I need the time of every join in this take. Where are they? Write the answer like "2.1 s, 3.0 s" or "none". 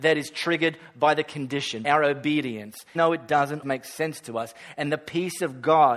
1.8 s, 3.0 s, 3.6 s